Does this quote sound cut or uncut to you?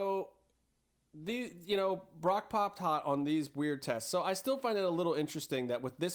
uncut